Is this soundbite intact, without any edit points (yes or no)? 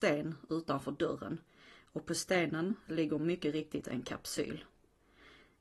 yes